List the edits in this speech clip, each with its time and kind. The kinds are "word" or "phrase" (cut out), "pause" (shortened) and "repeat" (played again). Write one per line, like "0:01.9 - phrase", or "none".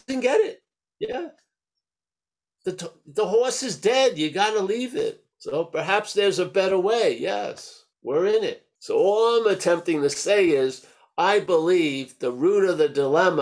0:05.3 - pause
0:07.9 - pause
0:08.8 - pause